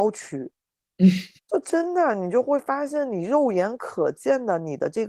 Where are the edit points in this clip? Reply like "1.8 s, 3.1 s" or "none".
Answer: 1.4 s